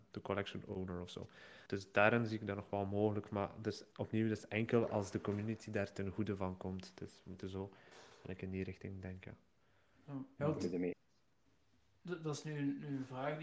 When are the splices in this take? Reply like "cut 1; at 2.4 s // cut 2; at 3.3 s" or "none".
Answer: cut 1; at 1.7 s // cut 2; at 3.9 s // cut 3; at 10.4 s